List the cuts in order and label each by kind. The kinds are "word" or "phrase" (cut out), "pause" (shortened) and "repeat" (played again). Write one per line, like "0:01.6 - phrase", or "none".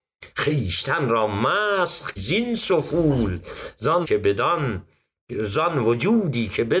0:02.2 - word
0:04.0 - word